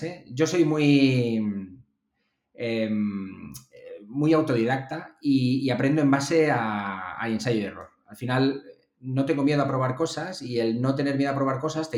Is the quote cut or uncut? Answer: uncut